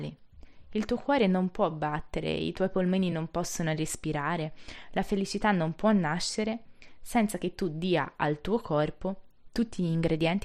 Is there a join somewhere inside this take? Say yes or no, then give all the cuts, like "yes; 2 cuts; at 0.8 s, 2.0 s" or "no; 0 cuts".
no; 0 cuts